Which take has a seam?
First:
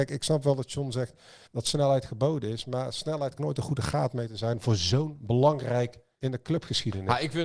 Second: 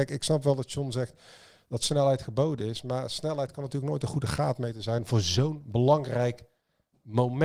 first; 3 cuts; at 1.5 s, 3.4 s, 6.2 s

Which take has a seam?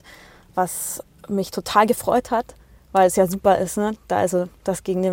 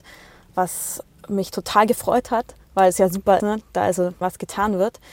second; 3 cuts; at 2.6 s, 3.4 s, 4.2 s

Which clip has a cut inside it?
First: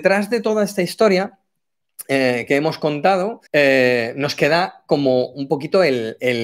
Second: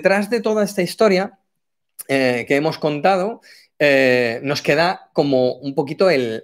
first; 1 cut; at 3.5 s

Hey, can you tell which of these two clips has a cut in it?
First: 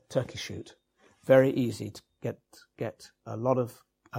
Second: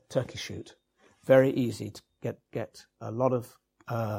second; 1 cut; at 2.5 s

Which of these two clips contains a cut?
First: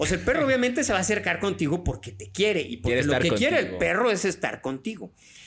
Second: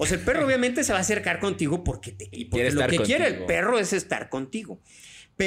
second; 1 cut; at 2.3 s

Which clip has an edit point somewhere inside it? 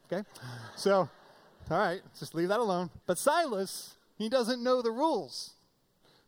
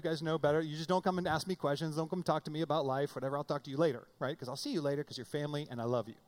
first; 1 cut; at 3.0 s

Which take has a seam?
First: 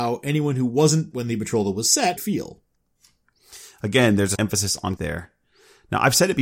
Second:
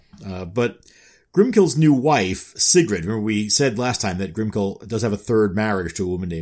first; 4 cuts; at 1.1 s, 2.2 s, 4.4 s, 5.0 s

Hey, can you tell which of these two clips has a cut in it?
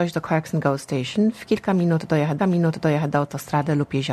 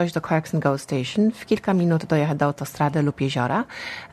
first; 1 cut; at 2.4 s

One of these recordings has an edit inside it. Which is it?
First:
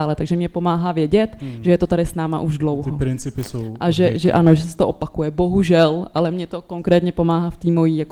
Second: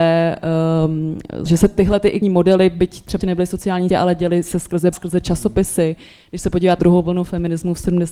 second; 6 cuts; at 1.5 s, 2.2 s, 3.2 s, 3.9 s, 4.9 s, 6.8 s

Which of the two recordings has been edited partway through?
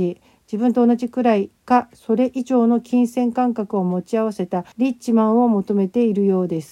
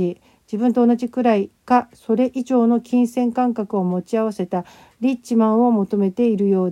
first; 1 cut; at 4.7 s

